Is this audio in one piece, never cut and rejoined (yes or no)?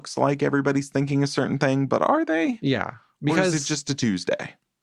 yes